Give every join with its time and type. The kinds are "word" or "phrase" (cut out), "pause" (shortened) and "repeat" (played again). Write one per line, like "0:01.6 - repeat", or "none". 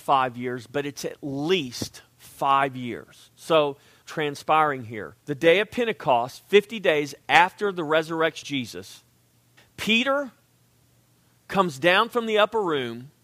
0:04.0 - phrase
0:05.2 - pause
0:08.4 - word
0:09.6 - pause

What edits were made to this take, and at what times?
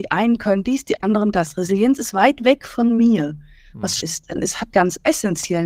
0:01.3 - word
0:04.0 - word
0:04.7 - word

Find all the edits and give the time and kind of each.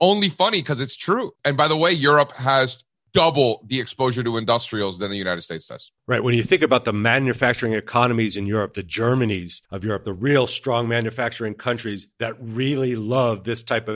0:01.4 - pause
0:06.0 - pause
0:09.6 - pause

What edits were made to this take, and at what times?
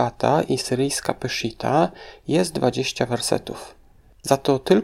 none

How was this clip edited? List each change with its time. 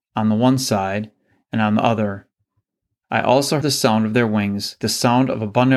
0:03.6 - word
0:04.8 - word

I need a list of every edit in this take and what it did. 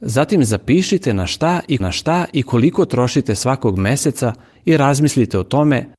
0:01.8 - repeat

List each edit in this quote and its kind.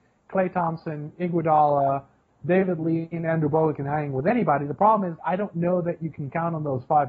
0:05.2 - word

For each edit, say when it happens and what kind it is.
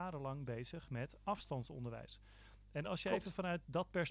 none

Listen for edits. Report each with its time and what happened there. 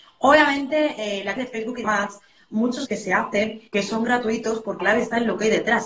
0:01.4 - word
0:01.8 - word
0:02.9 - word
0:03.7 - pause
0:04.8 - word

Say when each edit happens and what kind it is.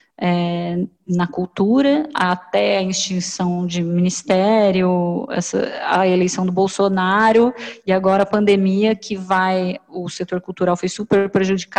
none

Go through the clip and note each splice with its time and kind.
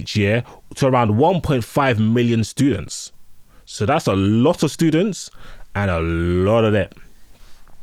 none

